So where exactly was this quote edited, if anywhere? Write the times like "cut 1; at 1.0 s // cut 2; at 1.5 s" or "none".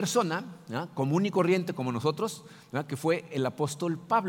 none